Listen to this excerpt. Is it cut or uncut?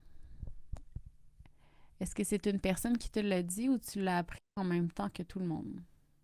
uncut